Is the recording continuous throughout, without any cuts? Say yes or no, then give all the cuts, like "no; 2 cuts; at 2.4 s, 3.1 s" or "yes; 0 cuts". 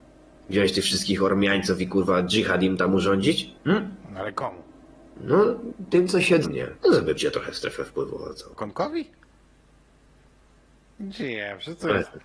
no; 6 cuts; at 3.6 s, 4.8 s, 6.4 s, 6.8 s, 7.2 s, 8.6 s